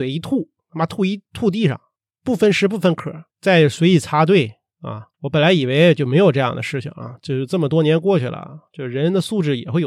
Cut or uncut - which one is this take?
cut